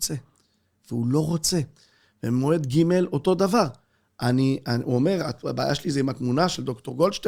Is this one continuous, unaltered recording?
yes; 0 cuts

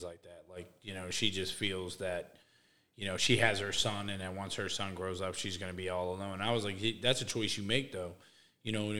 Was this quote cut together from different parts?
no; 0 cuts

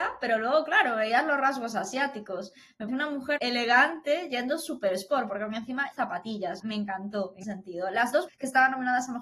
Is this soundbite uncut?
no; 6 cuts; at 2.9 s, 3.4 s, 5.9 s, 6.6 s, 7.4 s, 8.3 s

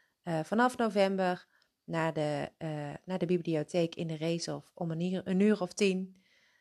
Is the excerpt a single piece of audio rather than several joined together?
yes; 0 cuts

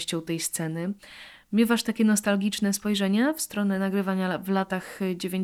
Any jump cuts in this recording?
no; 0 cuts

